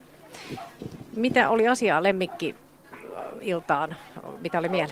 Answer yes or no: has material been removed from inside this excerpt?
no